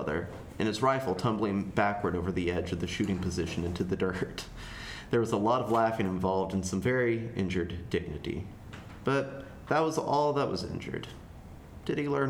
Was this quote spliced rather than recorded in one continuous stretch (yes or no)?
no